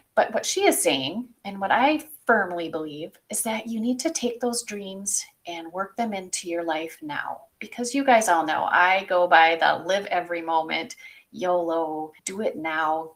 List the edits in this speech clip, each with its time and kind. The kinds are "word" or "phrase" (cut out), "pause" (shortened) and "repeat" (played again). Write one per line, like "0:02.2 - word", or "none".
0:07.5 - pause
0:12.2 - pause